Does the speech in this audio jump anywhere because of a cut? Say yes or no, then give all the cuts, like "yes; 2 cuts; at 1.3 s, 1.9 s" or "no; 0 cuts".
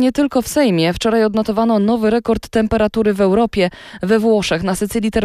no; 0 cuts